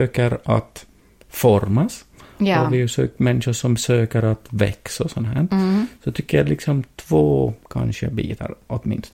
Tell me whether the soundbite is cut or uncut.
uncut